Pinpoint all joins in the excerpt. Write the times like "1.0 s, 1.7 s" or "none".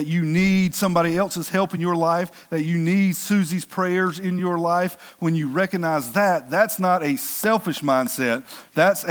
none